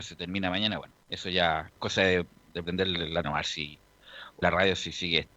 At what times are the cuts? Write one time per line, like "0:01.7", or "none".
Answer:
0:01.0
0:01.8
0:03.2
0:04.4